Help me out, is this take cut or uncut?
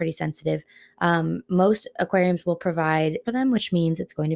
cut